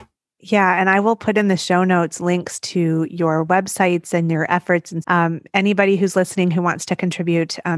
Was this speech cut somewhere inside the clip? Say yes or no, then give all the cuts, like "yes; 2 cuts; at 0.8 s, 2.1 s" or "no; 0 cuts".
yes; 1 cut; at 5.0 s